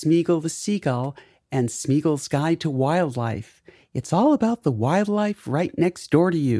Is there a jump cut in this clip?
no; 0 cuts

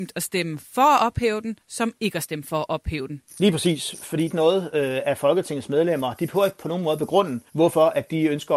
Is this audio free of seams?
no; 3 cuts; at 3.3 s, 4.3 s, 7.5 s

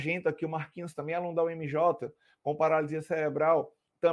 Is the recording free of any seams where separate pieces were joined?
yes; 0 cuts

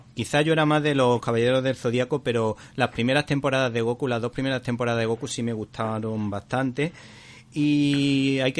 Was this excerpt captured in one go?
yes; 0 cuts

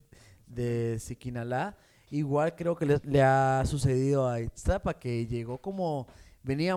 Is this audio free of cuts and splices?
yes; 0 cuts

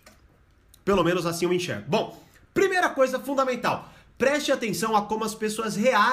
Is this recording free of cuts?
yes; 0 cuts

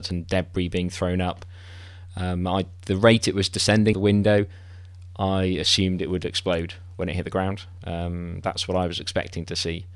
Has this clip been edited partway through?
yes; 1 cut; at 3.9 s

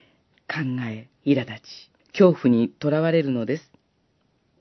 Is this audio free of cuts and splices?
no; 2 cuts; at 1.2 s, 2.0 s

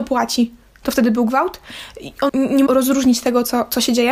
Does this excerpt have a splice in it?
yes; 2 cuts; at 2.3 s, 2.7 s

